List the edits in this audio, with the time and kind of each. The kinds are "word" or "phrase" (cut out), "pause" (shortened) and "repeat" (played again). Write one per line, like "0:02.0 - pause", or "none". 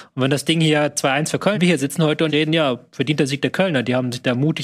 0:01.5 - phrase
0:02.3 - word

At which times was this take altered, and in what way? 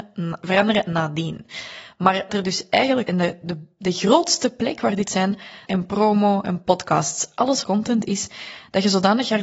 0:02.3 - word
0:03.0 - word
0:05.0 - word
0:05.6 - word
0:07.6 - word

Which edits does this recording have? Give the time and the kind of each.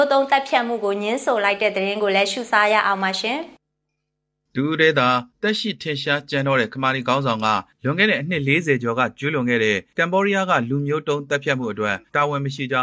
0:03.6 - pause

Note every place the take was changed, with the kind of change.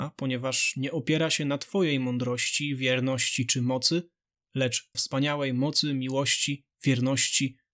0:04.9 - word

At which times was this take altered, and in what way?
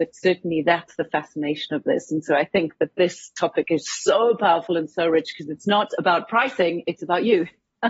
none

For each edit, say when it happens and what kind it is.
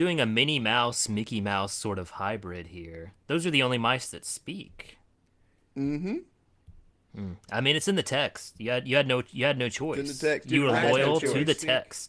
none

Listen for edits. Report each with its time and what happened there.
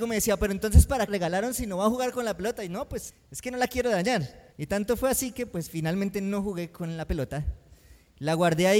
0:01.1 - phrase
0:03.1 - word
0:04.5 - pause

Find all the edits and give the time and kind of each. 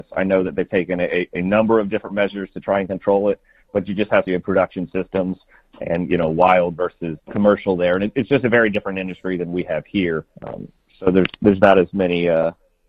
0:04.3 - phrase
0:07.2 - word
0:10.3 - pause

